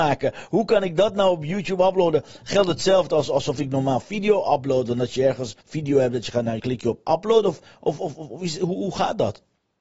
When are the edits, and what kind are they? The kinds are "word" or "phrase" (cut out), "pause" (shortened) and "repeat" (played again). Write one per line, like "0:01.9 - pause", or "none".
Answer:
0:05.6 - pause
0:06.6 - phrase